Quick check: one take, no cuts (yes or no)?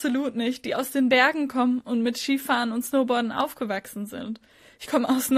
yes